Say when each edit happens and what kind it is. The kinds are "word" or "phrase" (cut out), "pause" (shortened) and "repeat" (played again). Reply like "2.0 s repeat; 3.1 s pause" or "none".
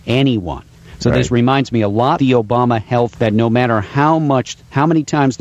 2.2 s word; 3.1 s word